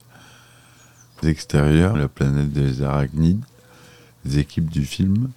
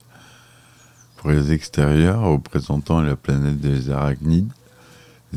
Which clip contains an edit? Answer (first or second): first